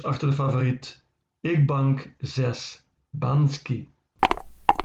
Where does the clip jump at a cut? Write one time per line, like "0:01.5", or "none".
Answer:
none